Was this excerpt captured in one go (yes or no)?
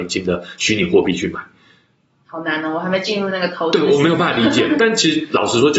yes